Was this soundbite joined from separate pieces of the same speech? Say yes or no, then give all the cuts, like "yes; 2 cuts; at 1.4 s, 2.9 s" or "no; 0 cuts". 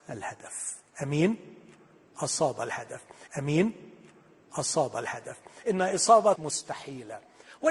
yes; 2 cuts; at 3.3 s, 6.4 s